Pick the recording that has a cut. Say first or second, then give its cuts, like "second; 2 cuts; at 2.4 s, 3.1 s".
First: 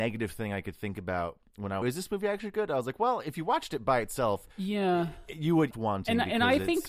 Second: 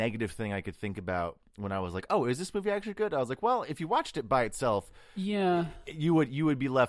first; 3 cuts; at 1.8 s, 4.5 s, 5.7 s